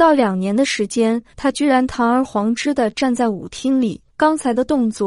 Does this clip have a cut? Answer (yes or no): yes